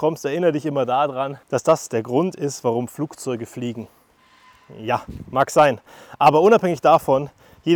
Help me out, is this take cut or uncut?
cut